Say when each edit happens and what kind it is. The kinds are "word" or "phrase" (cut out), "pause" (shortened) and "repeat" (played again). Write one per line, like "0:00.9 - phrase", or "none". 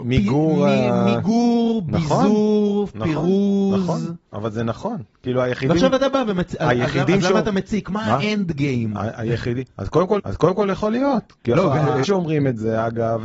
0:10.2 - repeat
0:12.0 - word